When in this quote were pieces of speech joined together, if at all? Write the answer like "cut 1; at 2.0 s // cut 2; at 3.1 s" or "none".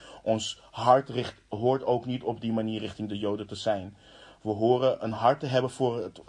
none